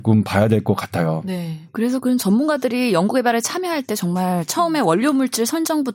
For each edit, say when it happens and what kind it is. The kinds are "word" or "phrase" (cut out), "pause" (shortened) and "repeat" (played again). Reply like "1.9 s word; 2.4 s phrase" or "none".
1.7 s pause

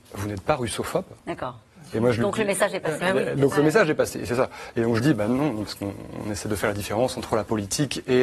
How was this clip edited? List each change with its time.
1.2 s pause; 5.0 s phrase

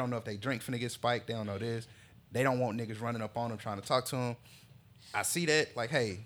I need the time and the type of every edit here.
none

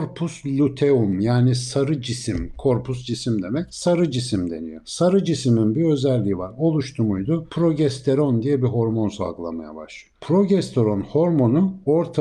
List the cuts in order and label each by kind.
none

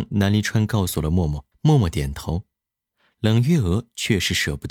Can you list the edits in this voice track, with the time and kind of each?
1.5 s pause

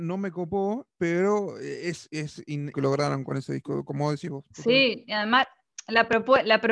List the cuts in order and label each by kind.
2.7 s phrase

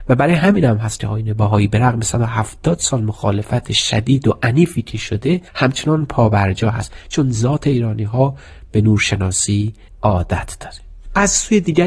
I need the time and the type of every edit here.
5.5 s pause; 9.9 s pause

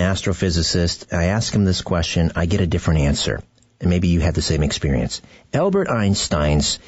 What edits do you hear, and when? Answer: none

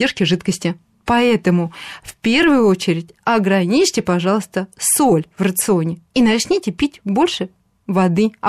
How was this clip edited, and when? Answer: none

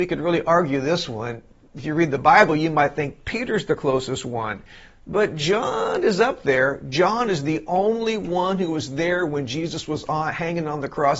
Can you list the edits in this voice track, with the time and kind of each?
none

